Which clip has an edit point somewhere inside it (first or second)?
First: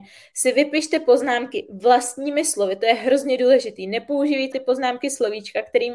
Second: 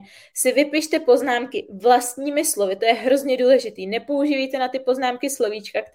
first